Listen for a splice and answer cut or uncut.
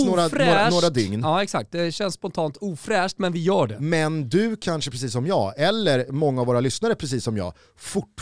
cut